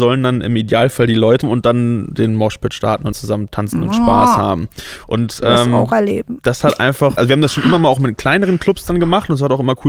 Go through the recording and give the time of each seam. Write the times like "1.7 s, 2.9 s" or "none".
1.4 s, 3.1 s, 7.2 s